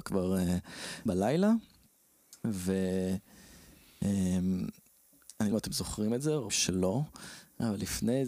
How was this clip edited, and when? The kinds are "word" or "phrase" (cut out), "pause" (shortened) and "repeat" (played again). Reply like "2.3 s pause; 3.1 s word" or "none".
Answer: 1.1 s word; 5.5 s word; 6.5 s word